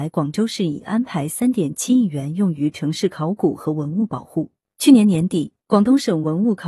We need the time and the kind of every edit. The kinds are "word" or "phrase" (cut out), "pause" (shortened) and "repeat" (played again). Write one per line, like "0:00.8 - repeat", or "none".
0:05.6 - pause